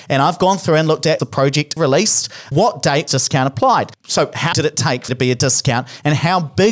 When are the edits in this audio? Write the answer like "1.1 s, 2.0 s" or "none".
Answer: 1.2 s, 1.8 s, 2.5 s, 3.1 s, 4.5 s, 5.1 s